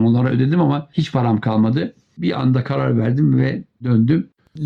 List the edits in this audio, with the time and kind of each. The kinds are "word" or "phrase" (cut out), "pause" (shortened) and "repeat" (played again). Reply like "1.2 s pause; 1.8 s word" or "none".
none